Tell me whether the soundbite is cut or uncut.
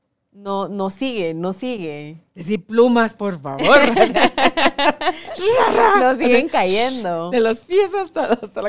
uncut